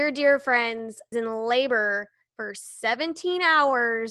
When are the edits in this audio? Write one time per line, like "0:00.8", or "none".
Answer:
0:01.1